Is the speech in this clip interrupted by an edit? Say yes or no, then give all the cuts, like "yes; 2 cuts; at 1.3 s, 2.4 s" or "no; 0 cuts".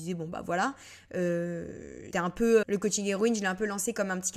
yes; 2 cuts; at 2.1 s, 2.6 s